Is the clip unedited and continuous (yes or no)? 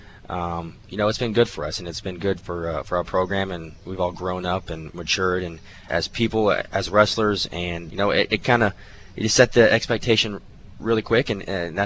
no